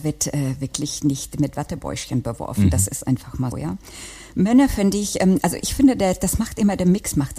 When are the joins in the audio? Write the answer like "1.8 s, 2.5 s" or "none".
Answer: 3.5 s